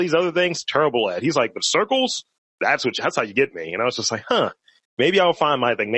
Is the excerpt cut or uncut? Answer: uncut